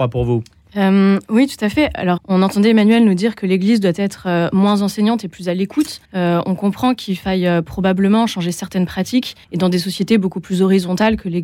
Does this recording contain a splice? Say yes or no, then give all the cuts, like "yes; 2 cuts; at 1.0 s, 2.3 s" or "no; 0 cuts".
yes; 3 cuts; at 2.2 s, 6.0 s, 9.4 s